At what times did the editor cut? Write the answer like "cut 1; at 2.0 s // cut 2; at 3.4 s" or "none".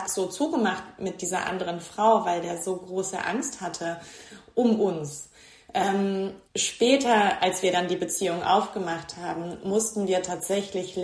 cut 1; at 6.4 s